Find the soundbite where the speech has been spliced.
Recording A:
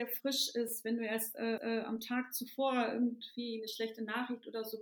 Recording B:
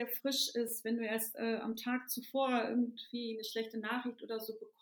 A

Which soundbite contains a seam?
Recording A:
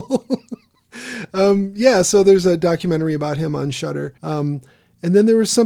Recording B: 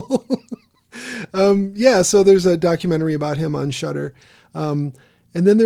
A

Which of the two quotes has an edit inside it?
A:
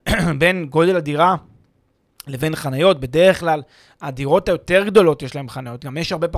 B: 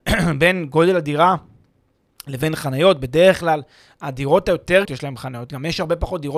B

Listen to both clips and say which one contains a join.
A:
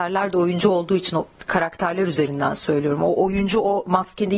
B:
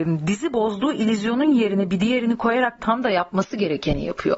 B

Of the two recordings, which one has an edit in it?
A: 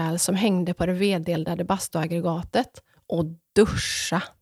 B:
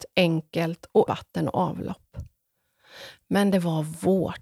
B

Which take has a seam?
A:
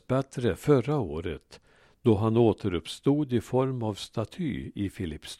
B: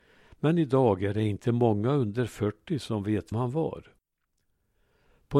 B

